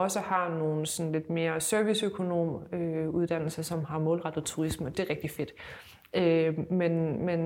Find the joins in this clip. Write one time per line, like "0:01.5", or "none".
0:04.9